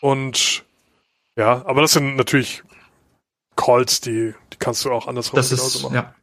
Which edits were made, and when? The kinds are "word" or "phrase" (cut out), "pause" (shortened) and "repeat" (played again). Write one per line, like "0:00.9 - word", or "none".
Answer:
none